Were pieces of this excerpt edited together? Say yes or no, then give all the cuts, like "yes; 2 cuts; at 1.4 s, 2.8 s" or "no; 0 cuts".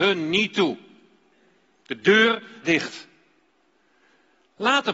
yes; 1 cut; at 2.6 s